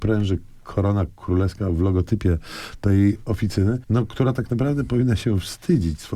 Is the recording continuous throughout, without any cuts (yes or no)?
no